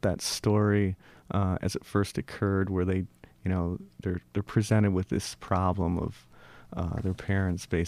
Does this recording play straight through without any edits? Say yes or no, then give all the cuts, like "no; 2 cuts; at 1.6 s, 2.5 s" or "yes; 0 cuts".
yes; 0 cuts